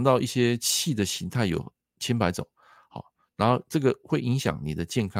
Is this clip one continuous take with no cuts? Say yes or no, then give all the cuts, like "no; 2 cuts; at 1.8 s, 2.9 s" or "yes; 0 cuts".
yes; 0 cuts